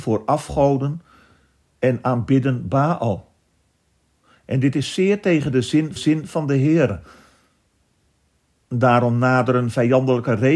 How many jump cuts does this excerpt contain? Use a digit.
1